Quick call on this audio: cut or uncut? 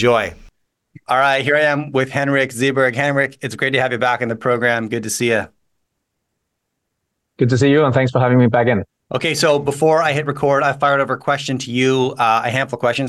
cut